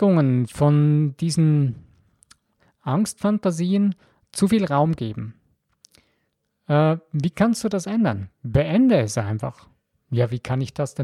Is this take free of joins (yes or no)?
yes